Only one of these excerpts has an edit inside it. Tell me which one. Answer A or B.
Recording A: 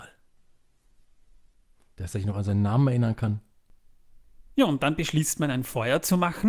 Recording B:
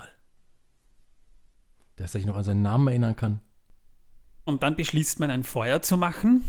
B